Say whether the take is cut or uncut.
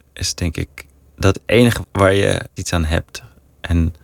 cut